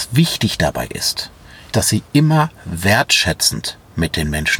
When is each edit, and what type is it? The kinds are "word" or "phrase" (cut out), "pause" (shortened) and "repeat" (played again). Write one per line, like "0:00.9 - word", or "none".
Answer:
0:01.7 - word